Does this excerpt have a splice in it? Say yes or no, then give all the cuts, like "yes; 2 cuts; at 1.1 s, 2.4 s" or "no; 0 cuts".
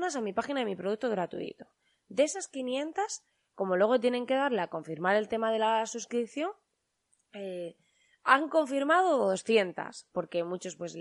no; 0 cuts